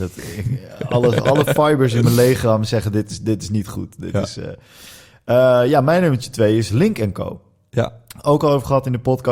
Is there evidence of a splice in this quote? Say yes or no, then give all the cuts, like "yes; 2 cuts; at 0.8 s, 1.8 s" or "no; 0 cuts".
no; 0 cuts